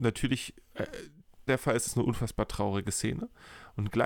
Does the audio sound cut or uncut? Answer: cut